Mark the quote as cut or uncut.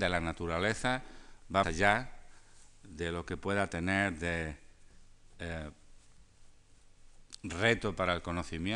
cut